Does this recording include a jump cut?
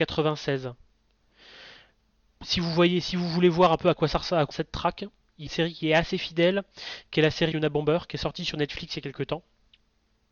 yes; 3 cuts; at 4.5 s, 5.5 s, 7.5 s

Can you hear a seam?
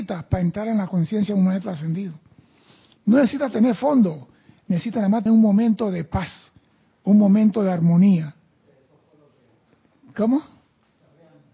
yes; 1 cut; at 5.3 s

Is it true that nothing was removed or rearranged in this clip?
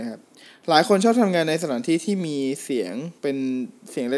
no; 1 cut; at 3.2 s

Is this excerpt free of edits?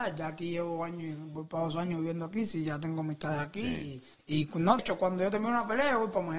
no; 2 cuts; at 4.1 s, 4.8 s

